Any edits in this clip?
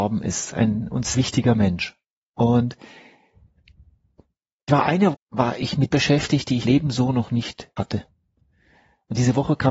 yes; 6 cuts; at 1.1 s, 4.7 s, 5.1 s, 5.9 s, 6.6 s, 7.8 s

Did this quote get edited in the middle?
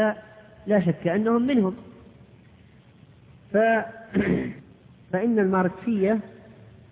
no; 0 cuts

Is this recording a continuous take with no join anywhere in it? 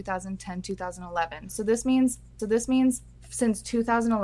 no; 1 cut; at 2.4 s

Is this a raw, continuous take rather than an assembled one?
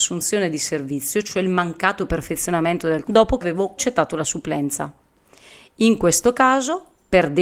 no; 3 cuts; at 3.0 s, 3.4 s, 3.8 s

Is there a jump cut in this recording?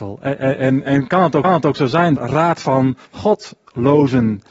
yes; 3 cuts; at 1.4 s, 2.2 s, 3.1 s

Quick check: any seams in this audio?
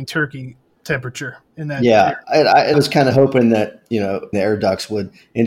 yes; 4 cuts; at 2.2 s, 2.7 s, 3.8 s, 4.3 s

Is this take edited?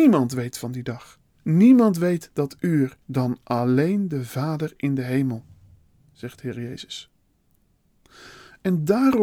yes; 1 cut; at 3.0 s

